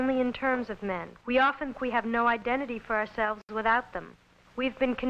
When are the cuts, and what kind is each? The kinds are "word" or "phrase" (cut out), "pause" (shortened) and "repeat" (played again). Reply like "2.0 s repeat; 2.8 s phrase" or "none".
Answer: 1.2 s pause; 1.7 s word

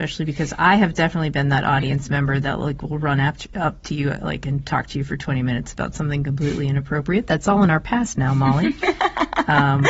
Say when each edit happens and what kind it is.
none

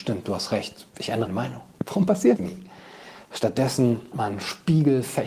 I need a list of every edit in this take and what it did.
1.3 s word; 2.4 s word; 4.1 s word

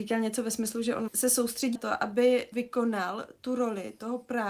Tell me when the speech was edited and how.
1.1 s word; 1.7 s word; 2.5 s word

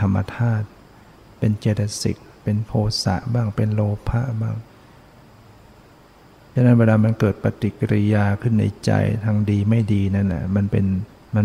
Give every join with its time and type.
none

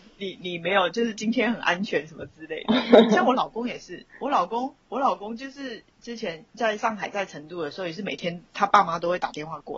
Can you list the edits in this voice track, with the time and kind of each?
4.8 s pause; 5.9 s pause

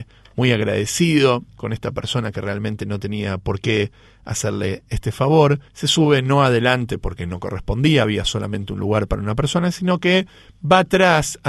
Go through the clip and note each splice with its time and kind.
1.5 s pause; 5.7 s pause

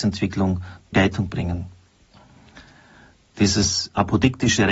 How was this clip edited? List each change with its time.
0.9 s word; 1.3 s word

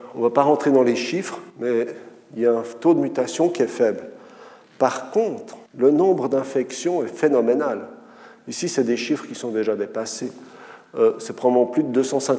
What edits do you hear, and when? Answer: 1.5 s pause; 5.7 s pause

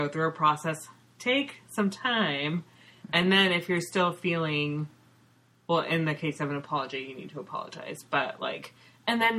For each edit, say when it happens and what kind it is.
none

